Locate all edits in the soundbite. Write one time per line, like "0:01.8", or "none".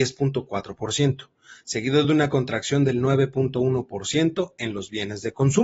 none

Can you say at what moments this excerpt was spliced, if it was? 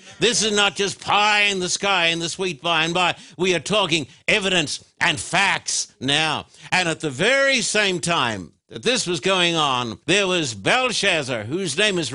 0:10.0

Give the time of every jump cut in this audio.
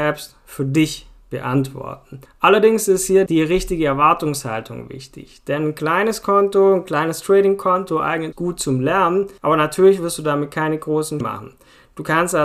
0:02.3
0:03.3
0:08.3
0:09.4
0:11.2

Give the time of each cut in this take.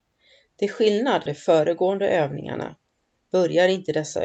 0:01.3

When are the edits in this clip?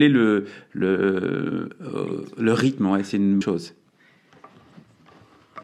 0:03.4

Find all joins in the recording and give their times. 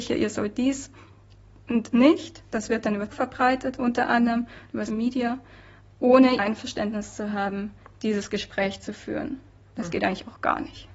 0:01.9
0:03.1
0:04.9
0:06.4

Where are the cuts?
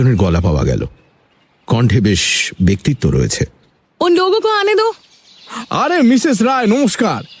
none

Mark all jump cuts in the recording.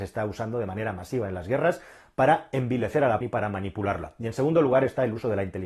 0:03.2

